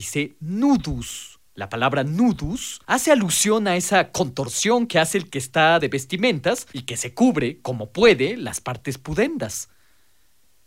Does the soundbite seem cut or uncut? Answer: cut